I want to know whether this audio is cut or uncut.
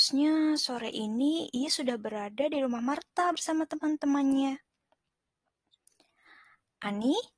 uncut